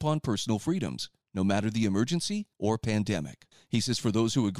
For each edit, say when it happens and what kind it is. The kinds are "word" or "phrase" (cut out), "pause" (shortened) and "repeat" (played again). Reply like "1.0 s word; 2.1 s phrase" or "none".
1.2 s pause; 2.5 s pause; 3.5 s pause